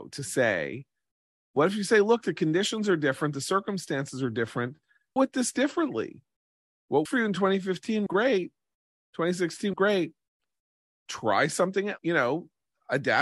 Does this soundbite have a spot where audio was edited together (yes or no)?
yes